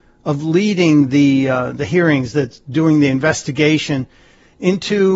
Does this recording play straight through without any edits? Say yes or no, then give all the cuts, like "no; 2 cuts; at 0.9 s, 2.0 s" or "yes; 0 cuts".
yes; 0 cuts